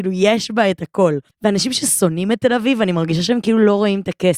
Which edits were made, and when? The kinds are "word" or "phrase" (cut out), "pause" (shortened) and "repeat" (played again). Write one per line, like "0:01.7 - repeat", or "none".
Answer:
0:01.3 - pause